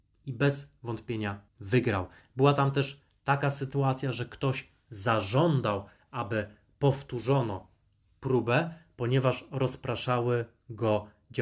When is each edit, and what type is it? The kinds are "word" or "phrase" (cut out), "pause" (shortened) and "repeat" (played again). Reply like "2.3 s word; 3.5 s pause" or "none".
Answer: 1.5 s pause